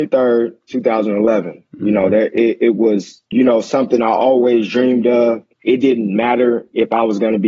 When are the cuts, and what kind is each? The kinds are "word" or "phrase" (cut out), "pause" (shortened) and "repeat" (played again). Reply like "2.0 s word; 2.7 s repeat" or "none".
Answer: 3.3 s pause; 5.5 s pause